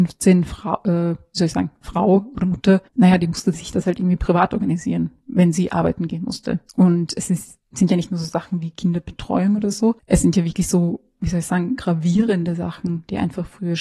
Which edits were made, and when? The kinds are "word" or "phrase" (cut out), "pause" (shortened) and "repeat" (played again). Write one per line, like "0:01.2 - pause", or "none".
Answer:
0:02.9 - pause
0:06.7 - pause
0:10.0 - pause